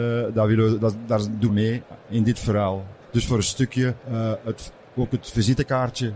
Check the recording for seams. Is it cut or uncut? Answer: cut